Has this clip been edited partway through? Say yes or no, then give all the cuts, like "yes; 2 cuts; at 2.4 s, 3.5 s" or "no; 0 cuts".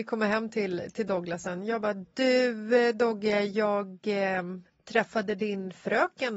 no; 0 cuts